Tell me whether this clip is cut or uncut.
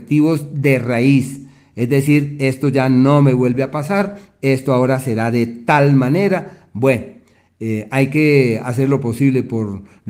uncut